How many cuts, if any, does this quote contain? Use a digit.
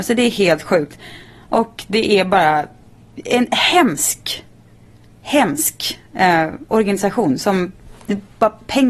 0